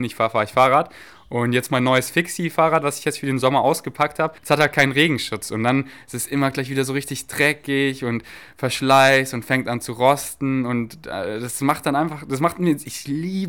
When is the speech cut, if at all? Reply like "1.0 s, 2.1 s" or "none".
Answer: 4.4 s